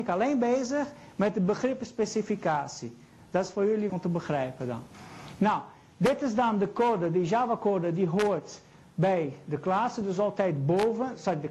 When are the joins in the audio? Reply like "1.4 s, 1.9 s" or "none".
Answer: 3.9 s